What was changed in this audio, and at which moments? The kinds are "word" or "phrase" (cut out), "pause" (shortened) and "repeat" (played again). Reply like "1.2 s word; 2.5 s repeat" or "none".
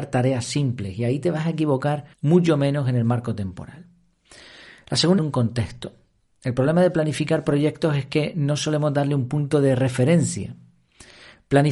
2.1 s pause; 5.2 s phrase